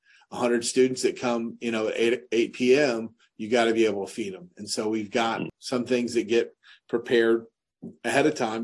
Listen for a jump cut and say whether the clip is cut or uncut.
uncut